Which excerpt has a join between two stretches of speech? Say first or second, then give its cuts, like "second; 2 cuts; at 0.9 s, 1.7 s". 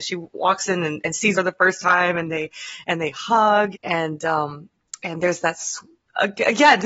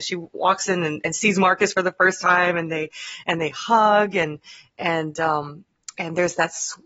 first; 2 cuts; at 1.3 s, 3.7 s